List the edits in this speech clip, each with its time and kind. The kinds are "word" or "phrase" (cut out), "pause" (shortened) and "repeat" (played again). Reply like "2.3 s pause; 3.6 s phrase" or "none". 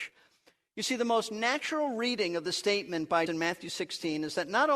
3.3 s word